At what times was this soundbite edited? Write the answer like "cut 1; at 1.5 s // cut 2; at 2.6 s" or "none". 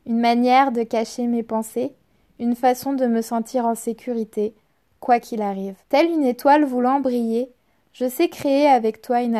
cut 1; at 5.8 s